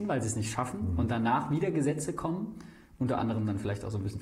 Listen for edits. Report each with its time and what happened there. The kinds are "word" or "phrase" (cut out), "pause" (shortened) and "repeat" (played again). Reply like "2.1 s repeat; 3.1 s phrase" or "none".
none

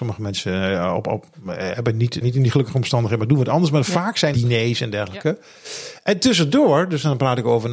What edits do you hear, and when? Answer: 2.2 s word; 4.3 s word

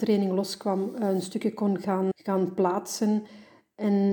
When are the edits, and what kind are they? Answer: 2.1 s word

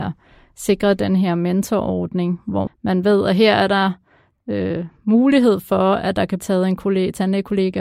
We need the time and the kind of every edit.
2.7 s word; 6.4 s word

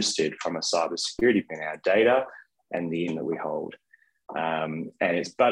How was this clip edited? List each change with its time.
1.5 s word; 3.1 s word

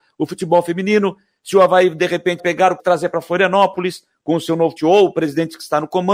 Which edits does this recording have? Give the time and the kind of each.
2.4 s word; 2.8 s word; 4.8 s word

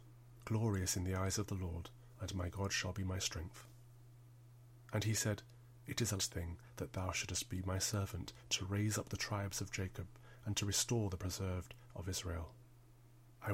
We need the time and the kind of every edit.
6.2 s word

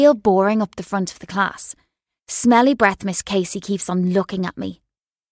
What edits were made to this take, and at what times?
none

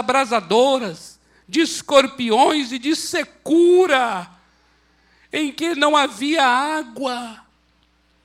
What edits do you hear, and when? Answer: none

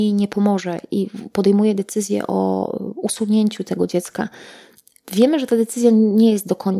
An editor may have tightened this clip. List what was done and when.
none

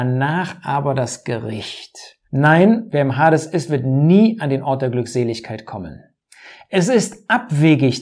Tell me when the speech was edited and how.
2.2 s pause

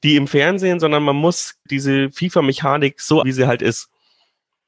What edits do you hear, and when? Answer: 1.7 s word; 3.2 s word

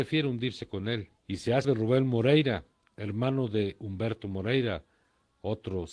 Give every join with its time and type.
1.2 s pause; 1.6 s word; 2.8 s pause

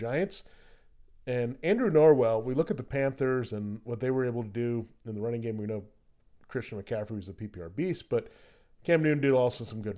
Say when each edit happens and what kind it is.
none

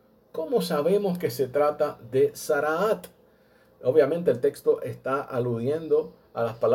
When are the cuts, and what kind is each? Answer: none

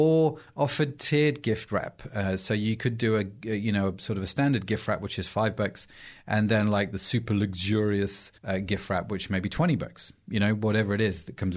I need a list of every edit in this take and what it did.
8.4 s pause

